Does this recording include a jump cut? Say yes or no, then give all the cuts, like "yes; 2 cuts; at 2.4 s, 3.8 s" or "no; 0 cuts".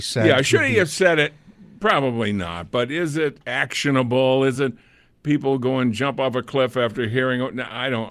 no; 0 cuts